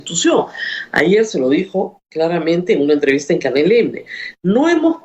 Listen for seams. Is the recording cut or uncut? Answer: uncut